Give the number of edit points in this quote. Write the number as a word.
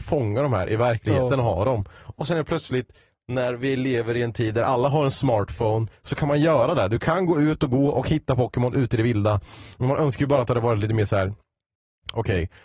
zero